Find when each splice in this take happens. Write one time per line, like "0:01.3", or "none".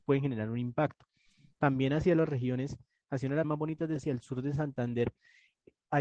0:03.4
0:04.0